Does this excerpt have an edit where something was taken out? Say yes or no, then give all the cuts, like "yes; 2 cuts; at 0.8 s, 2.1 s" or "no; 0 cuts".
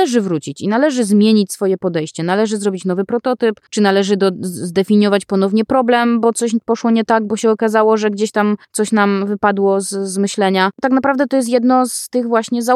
yes; 2 cuts; at 3.7 s, 8.6 s